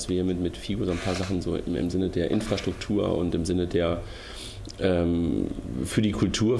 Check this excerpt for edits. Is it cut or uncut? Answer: uncut